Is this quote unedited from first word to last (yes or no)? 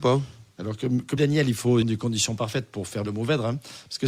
no